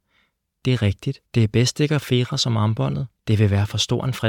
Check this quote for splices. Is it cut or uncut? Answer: cut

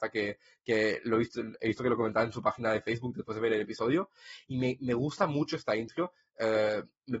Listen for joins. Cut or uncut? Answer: uncut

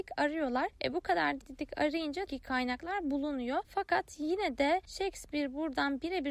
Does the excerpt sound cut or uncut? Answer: cut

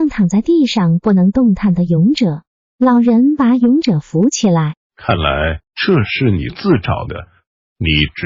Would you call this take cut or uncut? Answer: cut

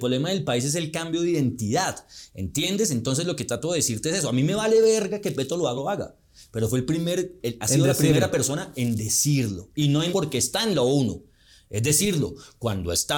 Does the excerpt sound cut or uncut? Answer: cut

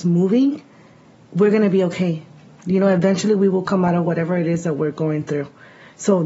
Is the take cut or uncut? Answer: uncut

